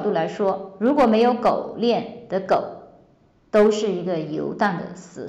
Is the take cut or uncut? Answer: uncut